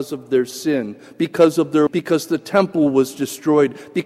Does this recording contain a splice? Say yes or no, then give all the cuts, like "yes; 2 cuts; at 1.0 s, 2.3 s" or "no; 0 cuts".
yes; 1 cut; at 1.9 s